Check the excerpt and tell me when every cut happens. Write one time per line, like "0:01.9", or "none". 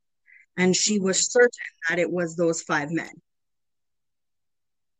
none